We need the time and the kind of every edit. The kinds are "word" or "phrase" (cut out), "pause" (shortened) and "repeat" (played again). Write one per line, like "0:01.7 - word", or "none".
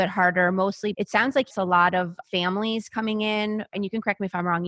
0:00.9 - word
0:01.5 - word
0:02.2 - word
0:03.7 - word